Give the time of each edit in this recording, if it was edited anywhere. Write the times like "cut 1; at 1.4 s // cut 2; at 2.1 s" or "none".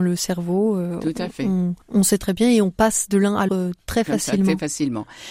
cut 1; at 1.8 s // cut 2; at 3.5 s